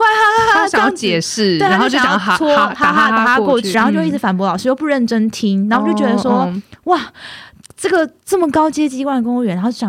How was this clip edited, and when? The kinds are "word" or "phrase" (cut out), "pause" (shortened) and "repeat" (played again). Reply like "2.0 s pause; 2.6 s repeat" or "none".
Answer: 3.7 s word